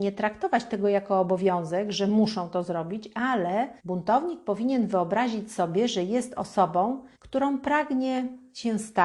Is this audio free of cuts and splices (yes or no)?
no